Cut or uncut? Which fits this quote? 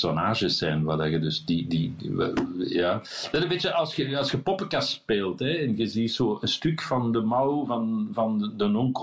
uncut